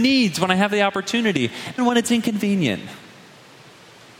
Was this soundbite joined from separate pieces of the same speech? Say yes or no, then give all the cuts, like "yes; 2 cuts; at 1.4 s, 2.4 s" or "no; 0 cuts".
yes; 1 cut; at 1.8 s